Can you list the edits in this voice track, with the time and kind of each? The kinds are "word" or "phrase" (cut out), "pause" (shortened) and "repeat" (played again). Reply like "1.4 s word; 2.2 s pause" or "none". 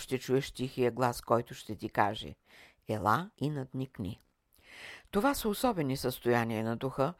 3.3 s pause